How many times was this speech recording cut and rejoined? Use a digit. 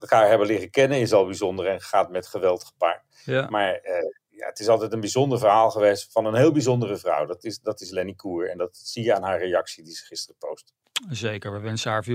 0